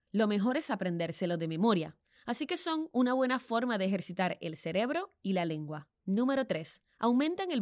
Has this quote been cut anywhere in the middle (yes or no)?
yes